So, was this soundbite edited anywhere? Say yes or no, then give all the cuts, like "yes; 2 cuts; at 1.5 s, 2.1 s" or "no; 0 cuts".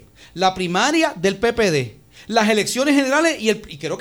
no; 0 cuts